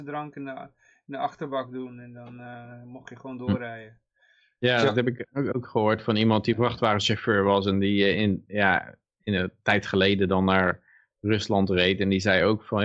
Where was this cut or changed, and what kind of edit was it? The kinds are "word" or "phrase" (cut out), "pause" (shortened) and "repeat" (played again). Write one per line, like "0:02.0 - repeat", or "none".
none